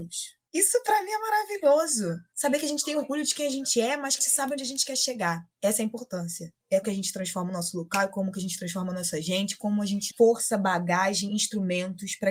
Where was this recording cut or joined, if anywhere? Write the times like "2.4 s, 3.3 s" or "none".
4.2 s, 6.8 s, 10.1 s